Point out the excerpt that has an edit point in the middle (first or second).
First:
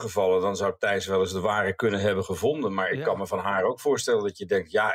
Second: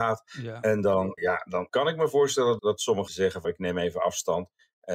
second